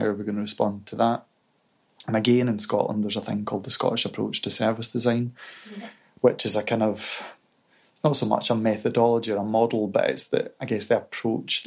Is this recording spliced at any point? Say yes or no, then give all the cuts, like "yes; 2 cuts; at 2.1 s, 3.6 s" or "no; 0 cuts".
no; 0 cuts